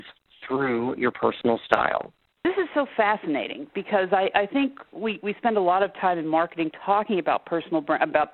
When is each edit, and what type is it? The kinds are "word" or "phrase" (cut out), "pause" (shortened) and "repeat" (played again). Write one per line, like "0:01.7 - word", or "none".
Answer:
0:02.3 - pause

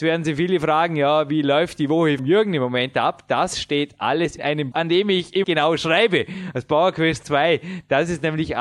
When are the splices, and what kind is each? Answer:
0:02.2 - word
0:04.4 - word
0:04.7 - word
0:05.4 - word

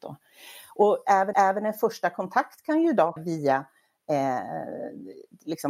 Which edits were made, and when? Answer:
0:01.3 - repeat
0:03.2 - word

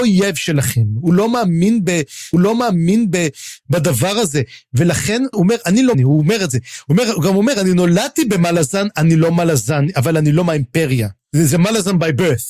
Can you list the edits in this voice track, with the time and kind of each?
0:02.3 - repeat
0:05.3 - phrase
0:05.9 - word

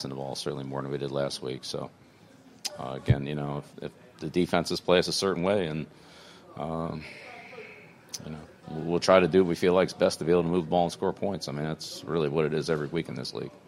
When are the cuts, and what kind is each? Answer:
0:03.7 - pause

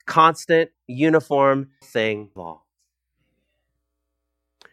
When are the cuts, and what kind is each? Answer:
0:01.8 - word
0:02.4 - word

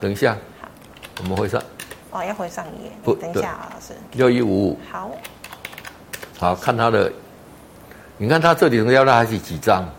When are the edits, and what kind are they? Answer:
0:02.0 - pause
0:03.0 - word
0:04.0 - pause
0:06.3 - pause

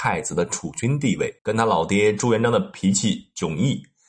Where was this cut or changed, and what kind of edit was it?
0:01.4 - pause

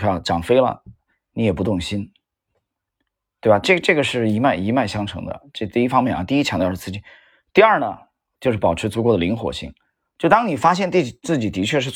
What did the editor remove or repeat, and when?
none

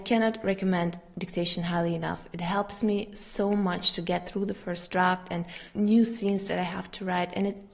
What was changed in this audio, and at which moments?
0:05.8 - word

